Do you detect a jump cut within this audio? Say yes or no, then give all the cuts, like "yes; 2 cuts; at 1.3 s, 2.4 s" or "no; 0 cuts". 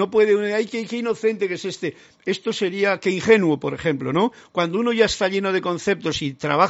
no; 0 cuts